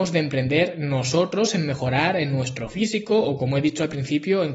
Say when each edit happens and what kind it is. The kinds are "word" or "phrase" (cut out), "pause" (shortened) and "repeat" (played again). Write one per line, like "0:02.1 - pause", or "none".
none